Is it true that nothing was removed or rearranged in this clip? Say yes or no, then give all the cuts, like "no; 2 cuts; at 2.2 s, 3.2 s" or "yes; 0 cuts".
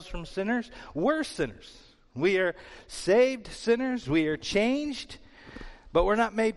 yes; 0 cuts